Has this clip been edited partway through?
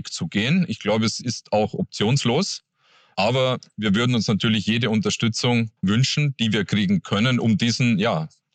yes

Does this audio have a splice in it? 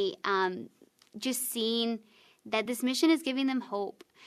no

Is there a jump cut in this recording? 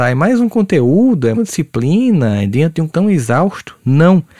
yes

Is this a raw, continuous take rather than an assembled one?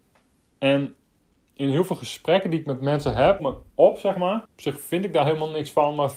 no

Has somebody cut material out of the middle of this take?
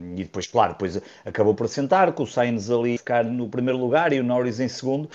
yes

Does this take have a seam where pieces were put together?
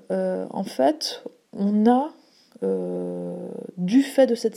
no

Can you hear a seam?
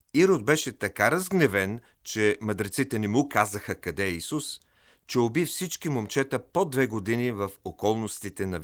no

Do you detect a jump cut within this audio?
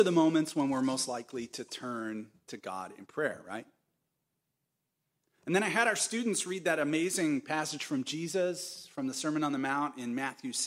no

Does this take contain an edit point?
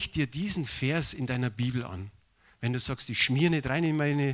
no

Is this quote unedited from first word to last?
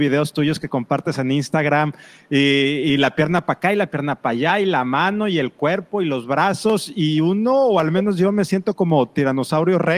yes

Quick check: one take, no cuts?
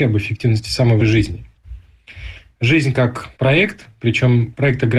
no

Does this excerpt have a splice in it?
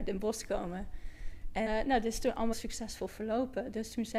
yes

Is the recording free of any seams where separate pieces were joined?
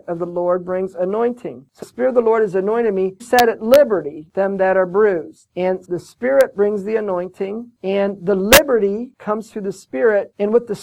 no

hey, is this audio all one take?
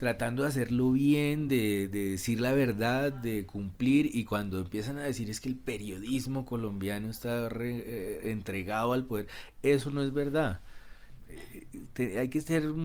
yes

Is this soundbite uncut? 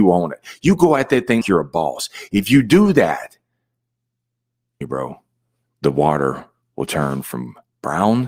no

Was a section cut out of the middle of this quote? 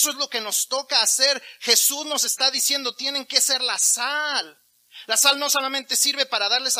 no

